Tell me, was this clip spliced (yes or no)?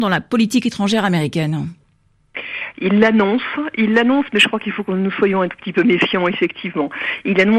no